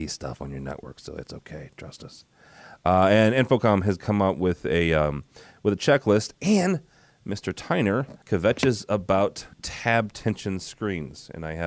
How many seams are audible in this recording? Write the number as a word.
two